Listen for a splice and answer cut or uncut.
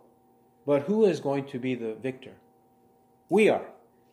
uncut